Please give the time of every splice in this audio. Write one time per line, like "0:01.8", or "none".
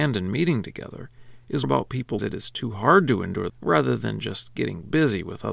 0:01.6
0:02.2
0:03.5